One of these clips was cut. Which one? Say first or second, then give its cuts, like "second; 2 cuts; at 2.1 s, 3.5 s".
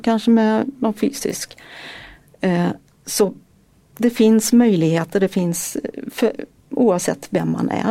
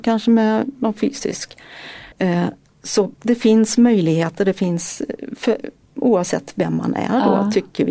second; 2 cuts; at 2.1 s, 3.1 s